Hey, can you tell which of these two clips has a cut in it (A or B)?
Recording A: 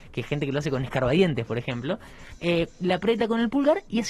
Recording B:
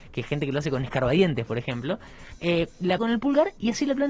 B